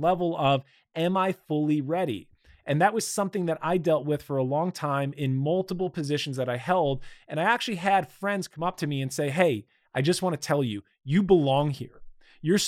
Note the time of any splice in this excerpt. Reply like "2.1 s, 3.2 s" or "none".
none